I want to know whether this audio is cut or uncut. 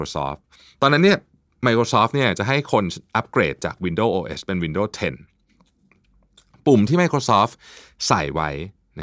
uncut